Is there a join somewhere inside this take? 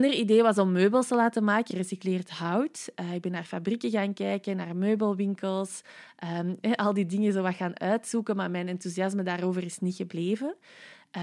yes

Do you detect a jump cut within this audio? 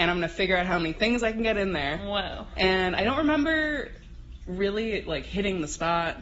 no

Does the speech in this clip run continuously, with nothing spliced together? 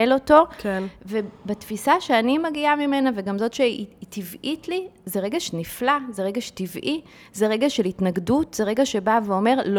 yes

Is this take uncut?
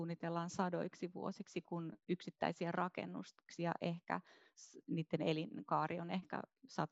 yes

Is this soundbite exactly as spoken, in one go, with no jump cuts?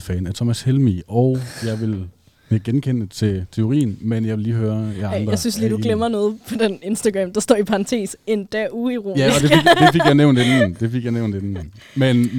yes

